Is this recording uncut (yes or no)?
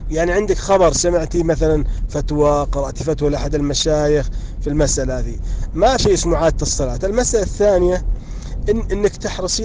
no